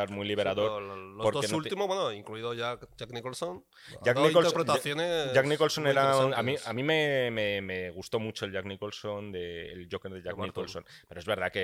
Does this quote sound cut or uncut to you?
uncut